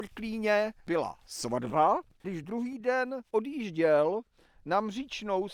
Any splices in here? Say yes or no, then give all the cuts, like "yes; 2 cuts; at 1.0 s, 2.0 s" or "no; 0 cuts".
no; 0 cuts